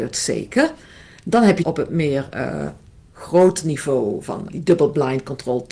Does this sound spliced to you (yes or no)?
yes